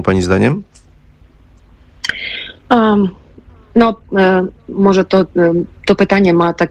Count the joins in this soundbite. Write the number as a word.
one